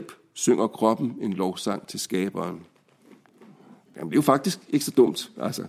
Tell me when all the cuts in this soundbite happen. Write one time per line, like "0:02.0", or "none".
none